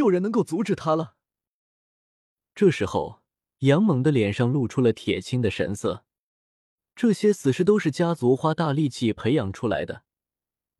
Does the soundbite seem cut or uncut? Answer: uncut